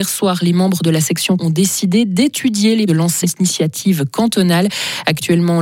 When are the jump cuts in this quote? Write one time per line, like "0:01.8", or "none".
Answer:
0:01.4
0:02.9
0:03.2